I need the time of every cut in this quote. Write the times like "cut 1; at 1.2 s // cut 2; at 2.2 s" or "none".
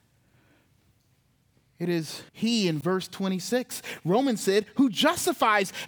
cut 1; at 2.3 s